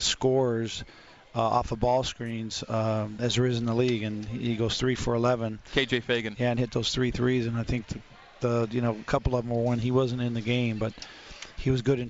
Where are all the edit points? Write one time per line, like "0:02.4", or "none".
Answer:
none

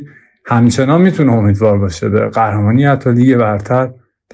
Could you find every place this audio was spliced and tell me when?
none

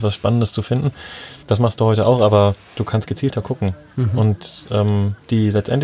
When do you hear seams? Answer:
0:01.4

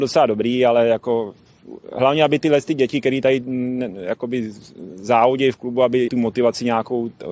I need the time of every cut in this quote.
0:06.1

